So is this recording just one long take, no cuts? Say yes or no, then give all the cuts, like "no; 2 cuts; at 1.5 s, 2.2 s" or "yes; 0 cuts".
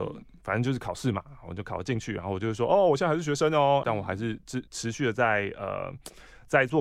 no; 2 cuts; at 3.8 s, 4.7 s